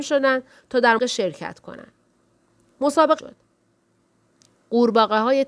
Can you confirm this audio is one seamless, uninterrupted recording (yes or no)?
no